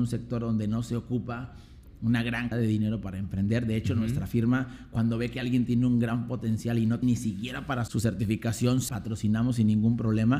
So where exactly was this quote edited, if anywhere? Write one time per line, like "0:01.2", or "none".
0:02.5
0:07.0
0:07.9
0:08.9